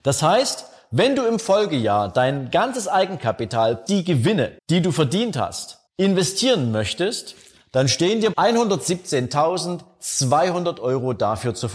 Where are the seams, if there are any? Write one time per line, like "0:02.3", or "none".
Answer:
0:03.9
0:04.6
0:05.9
0:08.3